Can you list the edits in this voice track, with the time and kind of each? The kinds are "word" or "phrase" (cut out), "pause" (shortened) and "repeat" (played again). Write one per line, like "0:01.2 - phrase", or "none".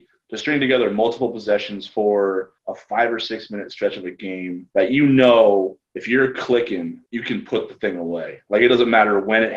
0:02.6 - pause
0:04.7 - pause
0:05.9 - pause
0:07.1 - pause